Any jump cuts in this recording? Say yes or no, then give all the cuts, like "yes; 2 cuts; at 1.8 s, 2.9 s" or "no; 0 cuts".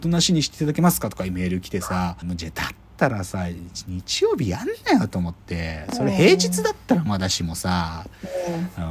yes; 1 cut; at 2.2 s